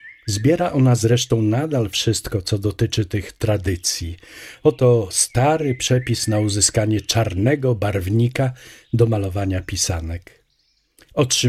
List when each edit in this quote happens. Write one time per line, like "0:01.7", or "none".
none